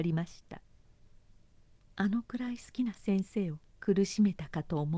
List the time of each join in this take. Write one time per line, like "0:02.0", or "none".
0:03.7